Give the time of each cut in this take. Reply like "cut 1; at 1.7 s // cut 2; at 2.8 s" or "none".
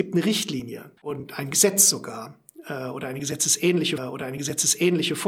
cut 1; at 1.0 s // cut 2; at 4.0 s